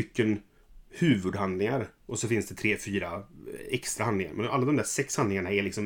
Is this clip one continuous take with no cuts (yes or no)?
yes